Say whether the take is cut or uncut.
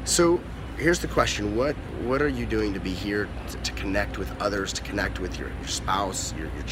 uncut